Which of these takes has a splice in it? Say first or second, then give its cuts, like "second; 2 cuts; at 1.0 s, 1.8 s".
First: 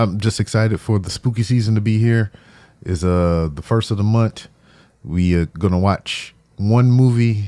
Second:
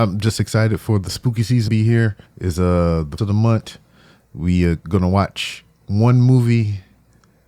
second; 3 cuts; at 1.7 s, 2.3 s, 3.2 s